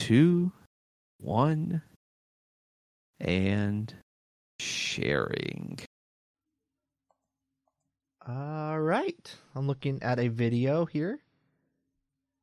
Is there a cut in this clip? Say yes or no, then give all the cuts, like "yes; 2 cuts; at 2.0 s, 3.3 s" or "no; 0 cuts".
no; 0 cuts